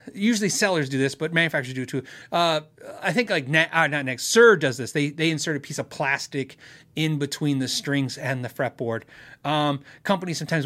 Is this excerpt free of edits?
yes; 0 cuts

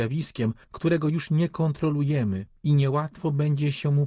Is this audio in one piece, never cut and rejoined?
yes; 0 cuts

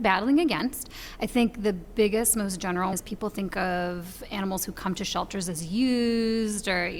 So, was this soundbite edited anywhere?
yes; 1 cut; at 2.9 s

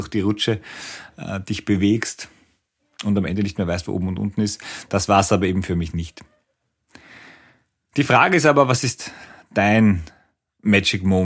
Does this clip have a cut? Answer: no; 0 cuts

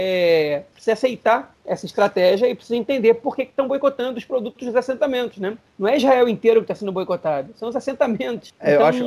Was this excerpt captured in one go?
yes; 0 cuts

